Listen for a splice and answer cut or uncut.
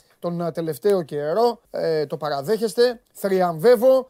cut